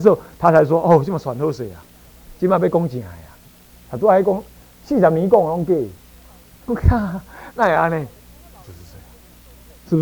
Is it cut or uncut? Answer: cut